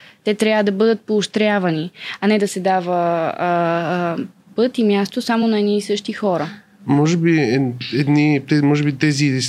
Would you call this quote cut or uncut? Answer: uncut